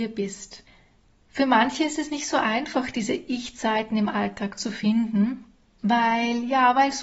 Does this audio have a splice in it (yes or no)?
no